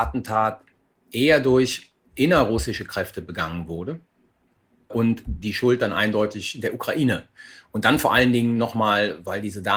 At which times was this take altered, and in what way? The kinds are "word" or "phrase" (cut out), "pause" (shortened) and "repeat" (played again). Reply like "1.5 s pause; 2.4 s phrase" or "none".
none